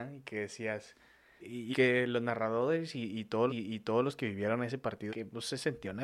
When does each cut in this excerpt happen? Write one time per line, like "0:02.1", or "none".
0:01.4
0:01.7
0:03.5
0:05.1